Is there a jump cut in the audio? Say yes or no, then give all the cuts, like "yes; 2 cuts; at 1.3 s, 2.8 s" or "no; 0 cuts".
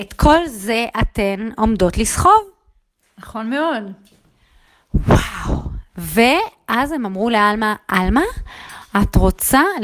no; 0 cuts